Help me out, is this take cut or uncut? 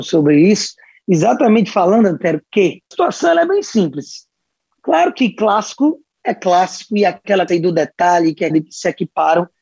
cut